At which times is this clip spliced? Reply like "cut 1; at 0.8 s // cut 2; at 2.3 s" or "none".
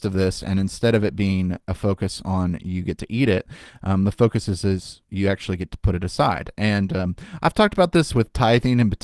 none